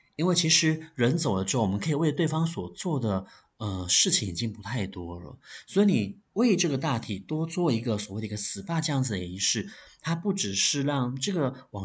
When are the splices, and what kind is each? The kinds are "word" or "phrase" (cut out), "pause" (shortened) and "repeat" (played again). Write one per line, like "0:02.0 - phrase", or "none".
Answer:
none